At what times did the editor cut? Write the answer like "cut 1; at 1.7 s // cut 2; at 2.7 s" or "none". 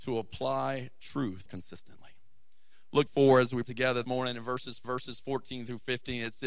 cut 1; at 1.5 s // cut 2; at 3.1 s // cut 3; at 3.6 s // cut 4; at 4.0 s // cut 5; at 4.8 s